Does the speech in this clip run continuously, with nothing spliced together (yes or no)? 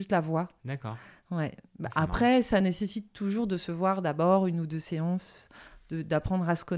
yes